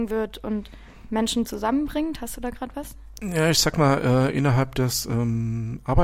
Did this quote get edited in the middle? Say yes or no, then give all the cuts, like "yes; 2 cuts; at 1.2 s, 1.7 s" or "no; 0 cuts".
no; 0 cuts